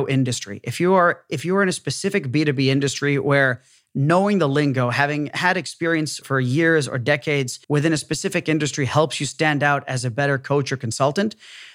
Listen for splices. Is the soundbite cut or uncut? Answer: cut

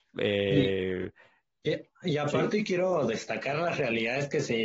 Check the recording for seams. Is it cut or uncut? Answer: uncut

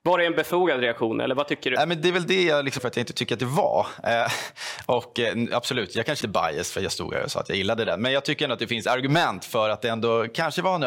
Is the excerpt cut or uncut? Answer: cut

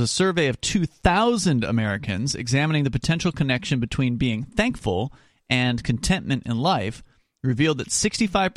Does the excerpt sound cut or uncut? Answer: uncut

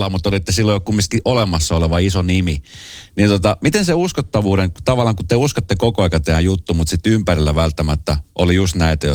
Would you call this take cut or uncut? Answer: uncut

